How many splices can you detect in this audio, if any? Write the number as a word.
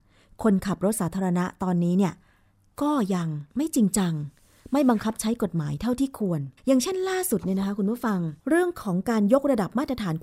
three